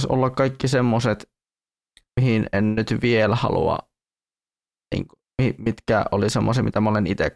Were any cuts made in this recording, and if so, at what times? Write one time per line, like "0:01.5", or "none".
none

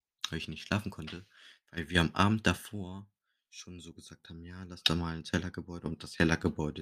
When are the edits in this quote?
none

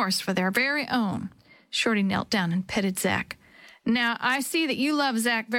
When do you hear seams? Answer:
none

